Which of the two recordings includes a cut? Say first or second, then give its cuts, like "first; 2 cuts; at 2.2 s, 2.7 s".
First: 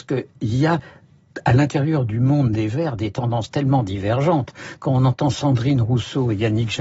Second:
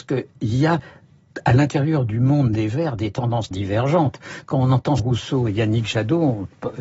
second; 2 cuts; at 3.5 s, 5.0 s